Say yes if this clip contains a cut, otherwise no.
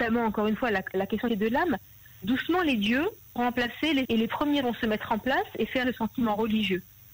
yes